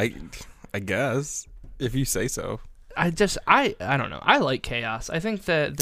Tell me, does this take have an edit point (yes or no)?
no